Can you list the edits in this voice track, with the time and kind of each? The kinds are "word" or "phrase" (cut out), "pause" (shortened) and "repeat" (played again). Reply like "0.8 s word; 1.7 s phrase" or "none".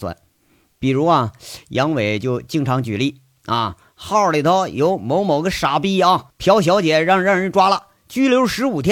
6.3 s pause